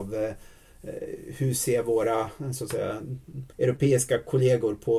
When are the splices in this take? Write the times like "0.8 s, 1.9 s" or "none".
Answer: 3.5 s